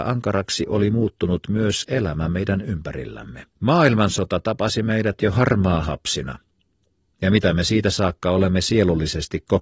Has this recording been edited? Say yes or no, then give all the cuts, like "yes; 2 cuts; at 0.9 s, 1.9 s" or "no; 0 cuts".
yes; 1 cut; at 3.5 s